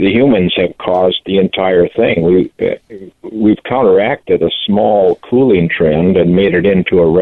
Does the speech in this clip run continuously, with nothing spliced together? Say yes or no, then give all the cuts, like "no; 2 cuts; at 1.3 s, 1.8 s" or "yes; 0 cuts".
yes; 0 cuts